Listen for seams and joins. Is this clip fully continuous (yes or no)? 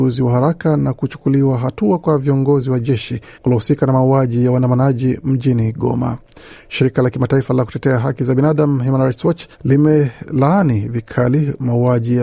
no